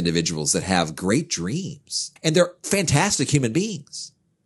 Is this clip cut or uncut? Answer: cut